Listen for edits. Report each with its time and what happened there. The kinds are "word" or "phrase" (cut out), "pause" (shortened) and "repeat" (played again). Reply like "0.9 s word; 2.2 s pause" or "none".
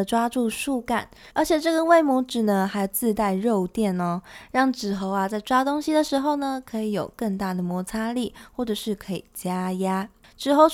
1.3 s pause